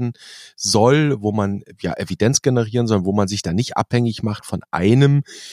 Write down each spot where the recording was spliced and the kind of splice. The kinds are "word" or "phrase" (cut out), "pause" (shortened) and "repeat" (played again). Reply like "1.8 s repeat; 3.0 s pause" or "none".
none